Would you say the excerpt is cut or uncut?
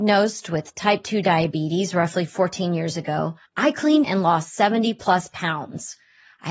cut